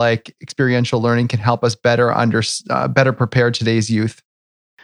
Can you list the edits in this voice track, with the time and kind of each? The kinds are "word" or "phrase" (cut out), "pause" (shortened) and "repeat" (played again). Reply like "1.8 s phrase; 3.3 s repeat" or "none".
none